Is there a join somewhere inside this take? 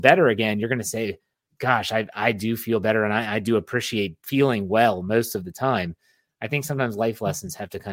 no; 0 cuts

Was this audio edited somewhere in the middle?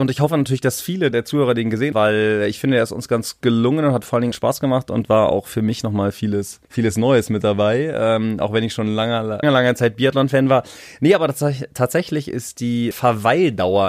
yes; 7 cuts; at 1.1 s, 1.9 s, 3.4 s, 4.3 s, 6.6 s, 9.4 s, 12.9 s

